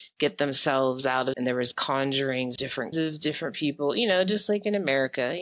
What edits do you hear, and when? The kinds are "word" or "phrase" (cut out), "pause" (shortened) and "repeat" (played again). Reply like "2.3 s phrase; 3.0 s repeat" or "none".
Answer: 1.3 s word; 2.6 s word; 2.9 s word